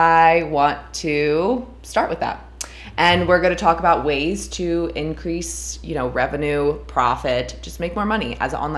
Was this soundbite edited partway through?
no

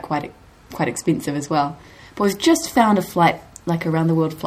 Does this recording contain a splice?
no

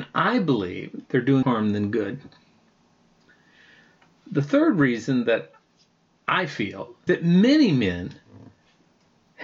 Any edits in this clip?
yes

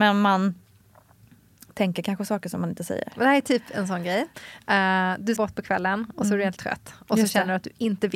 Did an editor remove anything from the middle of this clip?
yes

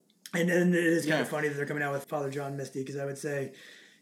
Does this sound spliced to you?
yes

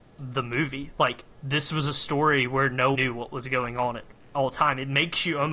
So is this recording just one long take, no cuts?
no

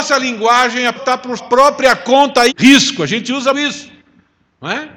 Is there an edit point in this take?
yes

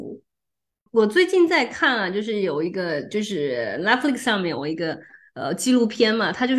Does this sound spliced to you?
no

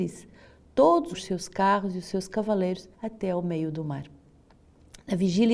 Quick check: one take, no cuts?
no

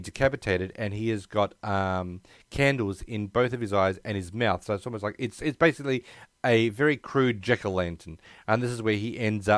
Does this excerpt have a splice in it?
no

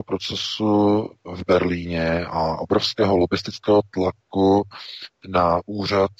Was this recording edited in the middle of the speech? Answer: no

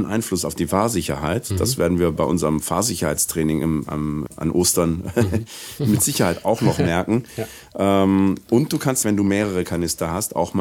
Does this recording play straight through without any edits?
no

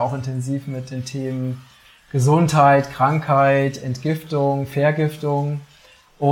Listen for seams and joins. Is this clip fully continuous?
yes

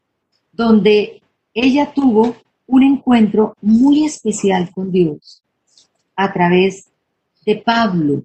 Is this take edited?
no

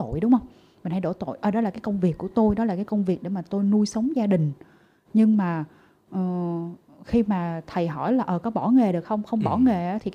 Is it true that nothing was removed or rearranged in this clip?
yes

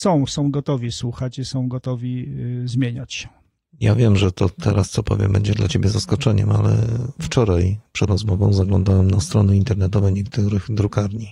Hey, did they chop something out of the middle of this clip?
yes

